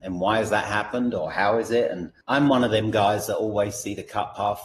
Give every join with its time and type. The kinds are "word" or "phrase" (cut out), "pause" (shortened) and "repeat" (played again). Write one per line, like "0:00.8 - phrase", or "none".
0:02.2 - pause